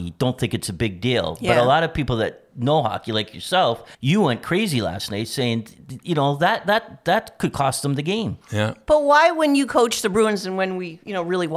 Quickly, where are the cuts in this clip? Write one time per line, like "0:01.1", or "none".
0:03.9
0:08.4